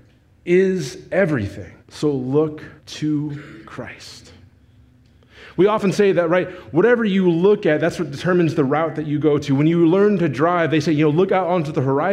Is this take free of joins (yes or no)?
no